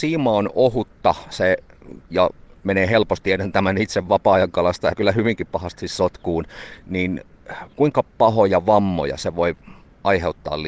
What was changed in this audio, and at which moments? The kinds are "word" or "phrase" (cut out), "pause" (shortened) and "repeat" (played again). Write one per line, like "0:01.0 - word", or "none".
0:02.1 - pause
0:03.2 - word
0:04.9 - phrase
0:07.7 - pause